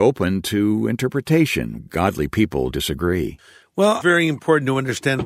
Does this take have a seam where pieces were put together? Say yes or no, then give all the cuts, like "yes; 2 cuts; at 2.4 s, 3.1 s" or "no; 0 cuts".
yes; 3 cuts; at 1.8 s, 2.7 s, 4.0 s